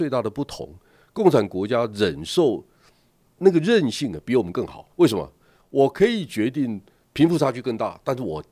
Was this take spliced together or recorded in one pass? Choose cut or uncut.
cut